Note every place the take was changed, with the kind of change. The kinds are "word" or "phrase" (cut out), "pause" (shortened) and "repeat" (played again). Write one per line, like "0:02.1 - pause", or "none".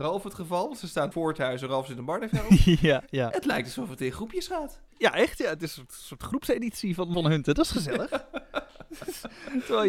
0:01.1 - phrase
0:04.9 - pause
0:07.1 - word